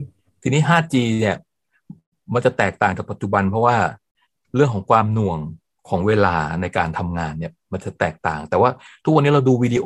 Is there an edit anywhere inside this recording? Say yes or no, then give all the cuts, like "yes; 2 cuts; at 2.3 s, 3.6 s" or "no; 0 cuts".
no; 0 cuts